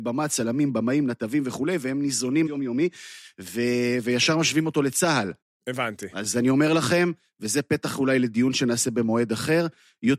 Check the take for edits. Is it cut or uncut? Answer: cut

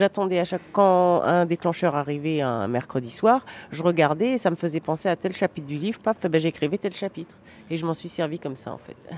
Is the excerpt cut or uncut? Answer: uncut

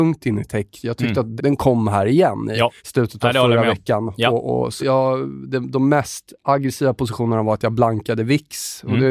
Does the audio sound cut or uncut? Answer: cut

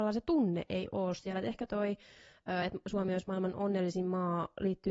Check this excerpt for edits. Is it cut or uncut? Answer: uncut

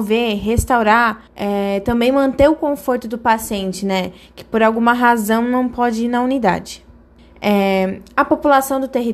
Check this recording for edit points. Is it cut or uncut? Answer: cut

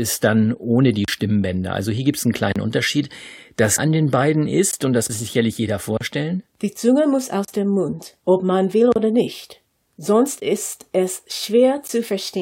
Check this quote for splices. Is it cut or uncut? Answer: cut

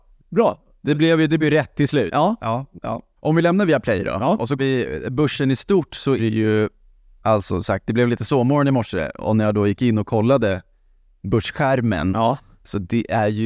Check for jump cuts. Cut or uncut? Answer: cut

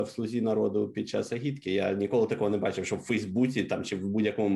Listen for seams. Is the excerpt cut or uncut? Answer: uncut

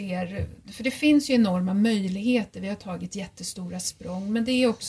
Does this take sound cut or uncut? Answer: uncut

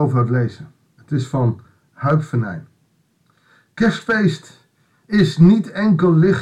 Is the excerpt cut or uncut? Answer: uncut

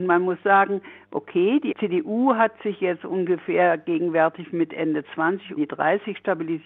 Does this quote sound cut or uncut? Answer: cut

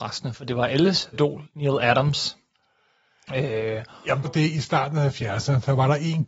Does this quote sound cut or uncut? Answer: cut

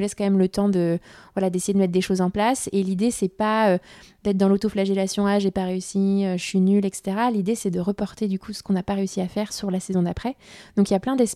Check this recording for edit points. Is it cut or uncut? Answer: uncut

